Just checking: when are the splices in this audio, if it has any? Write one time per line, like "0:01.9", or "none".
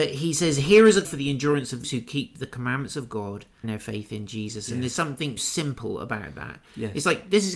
0:01.0
0:01.8
0:03.6
0:05.4